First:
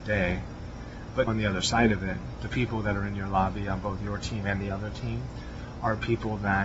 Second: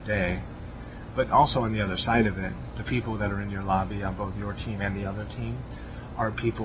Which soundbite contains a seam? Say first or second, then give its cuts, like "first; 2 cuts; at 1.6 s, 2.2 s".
first; 1 cut; at 1.3 s